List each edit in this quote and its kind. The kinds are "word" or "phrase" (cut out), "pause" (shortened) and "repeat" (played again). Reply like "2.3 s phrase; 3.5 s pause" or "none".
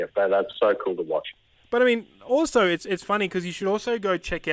none